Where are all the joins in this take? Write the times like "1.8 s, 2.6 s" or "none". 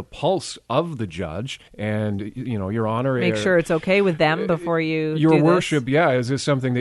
1.7 s